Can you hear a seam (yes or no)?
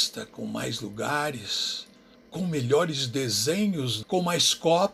yes